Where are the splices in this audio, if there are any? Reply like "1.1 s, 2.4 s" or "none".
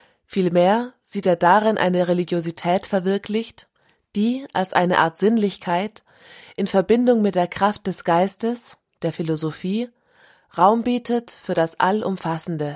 none